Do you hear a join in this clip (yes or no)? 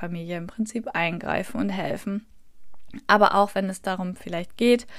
no